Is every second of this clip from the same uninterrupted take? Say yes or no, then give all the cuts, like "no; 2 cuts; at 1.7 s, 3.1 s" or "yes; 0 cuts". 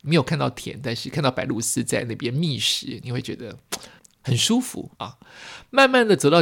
no; 2 cuts; at 4.0 s, 4.9 s